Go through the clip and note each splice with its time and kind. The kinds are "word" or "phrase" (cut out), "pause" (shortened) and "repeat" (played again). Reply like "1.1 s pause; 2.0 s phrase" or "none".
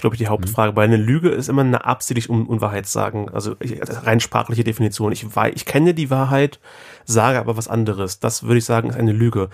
none